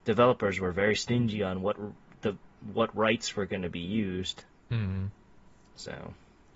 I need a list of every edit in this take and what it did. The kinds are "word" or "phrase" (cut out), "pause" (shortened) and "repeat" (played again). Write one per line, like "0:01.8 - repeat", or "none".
none